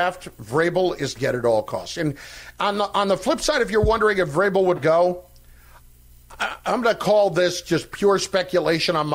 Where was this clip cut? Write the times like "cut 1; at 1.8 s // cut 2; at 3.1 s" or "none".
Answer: cut 1; at 1.2 s // cut 2; at 4.8 s